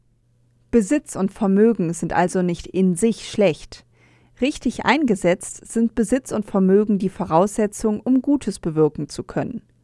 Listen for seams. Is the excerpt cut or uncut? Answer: uncut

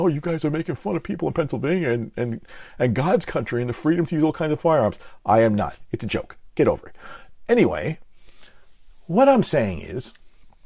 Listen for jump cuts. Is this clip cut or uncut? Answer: uncut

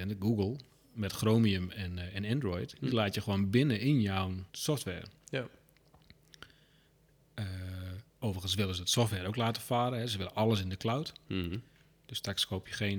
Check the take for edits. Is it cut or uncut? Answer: cut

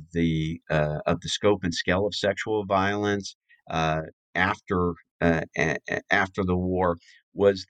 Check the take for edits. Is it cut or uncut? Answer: uncut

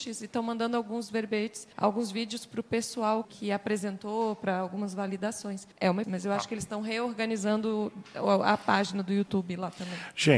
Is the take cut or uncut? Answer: cut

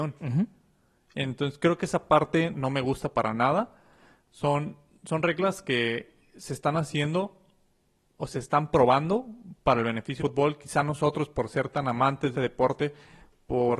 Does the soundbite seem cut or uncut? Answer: cut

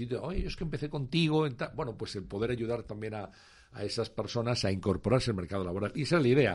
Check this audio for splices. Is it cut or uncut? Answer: uncut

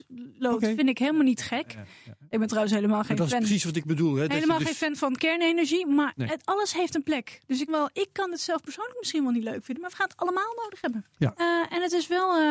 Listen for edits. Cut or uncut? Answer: cut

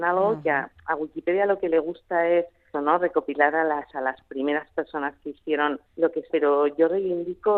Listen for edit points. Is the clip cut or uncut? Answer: cut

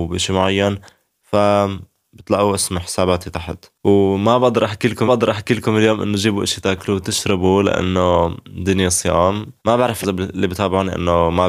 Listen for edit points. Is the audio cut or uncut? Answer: cut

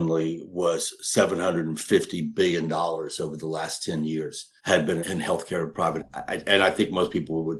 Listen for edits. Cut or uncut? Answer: cut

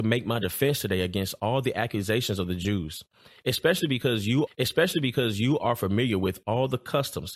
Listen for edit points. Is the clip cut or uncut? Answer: cut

